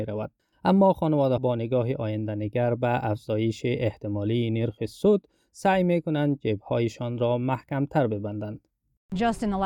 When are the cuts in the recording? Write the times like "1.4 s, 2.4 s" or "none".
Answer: 1.4 s